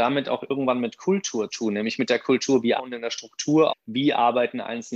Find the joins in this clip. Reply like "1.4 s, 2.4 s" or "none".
1.5 s, 2.8 s, 3.7 s